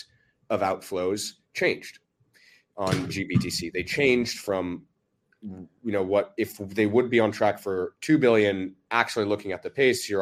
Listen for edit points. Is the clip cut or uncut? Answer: uncut